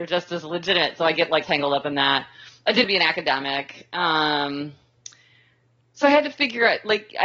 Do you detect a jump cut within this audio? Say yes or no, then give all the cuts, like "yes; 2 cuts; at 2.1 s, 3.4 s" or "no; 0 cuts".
yes; 2 cuts; at 1.4 s, 2.8 s